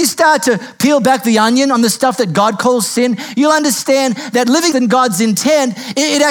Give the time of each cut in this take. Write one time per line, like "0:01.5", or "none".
0:04.7